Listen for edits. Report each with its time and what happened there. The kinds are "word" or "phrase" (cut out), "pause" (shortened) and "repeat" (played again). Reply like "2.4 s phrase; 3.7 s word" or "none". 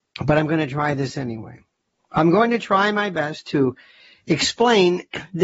none